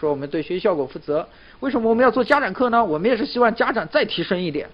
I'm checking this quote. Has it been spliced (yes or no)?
no